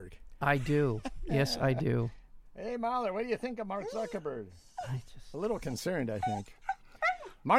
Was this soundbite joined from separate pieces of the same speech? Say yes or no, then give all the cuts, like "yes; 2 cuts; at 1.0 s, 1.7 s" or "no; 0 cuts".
no; 0 cuts